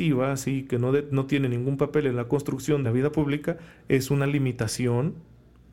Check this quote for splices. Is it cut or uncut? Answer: cut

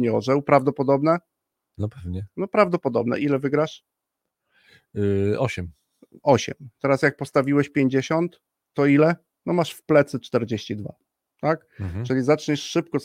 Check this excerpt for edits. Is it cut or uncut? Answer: uncut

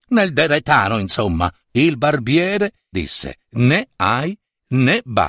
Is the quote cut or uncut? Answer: cut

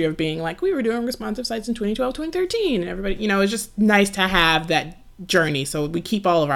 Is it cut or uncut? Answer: uncut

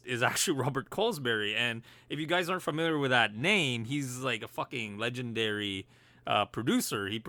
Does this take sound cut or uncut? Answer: uncut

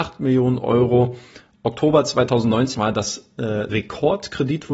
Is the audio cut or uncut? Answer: cut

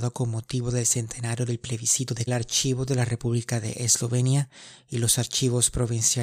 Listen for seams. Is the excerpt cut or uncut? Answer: cut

